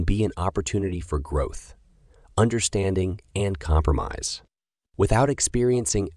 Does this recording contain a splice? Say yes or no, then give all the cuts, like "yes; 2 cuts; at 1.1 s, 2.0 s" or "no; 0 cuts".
no; 0 cuts